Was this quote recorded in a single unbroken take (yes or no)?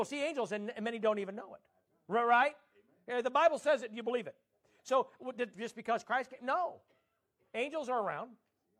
no